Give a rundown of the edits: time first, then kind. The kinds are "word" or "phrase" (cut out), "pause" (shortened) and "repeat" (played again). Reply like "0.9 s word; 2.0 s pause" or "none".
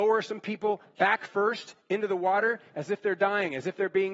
none